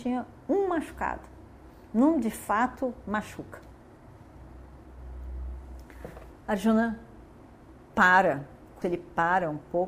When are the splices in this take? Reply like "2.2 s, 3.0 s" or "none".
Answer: 8.8 s